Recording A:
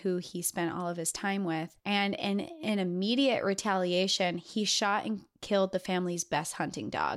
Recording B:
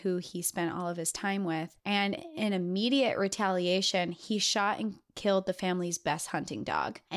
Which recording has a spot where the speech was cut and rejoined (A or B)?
B